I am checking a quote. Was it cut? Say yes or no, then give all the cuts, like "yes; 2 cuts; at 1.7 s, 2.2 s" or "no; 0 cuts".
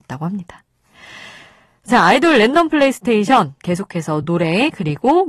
no; 0 cuts